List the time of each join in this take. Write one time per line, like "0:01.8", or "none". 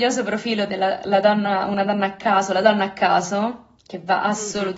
0:03.8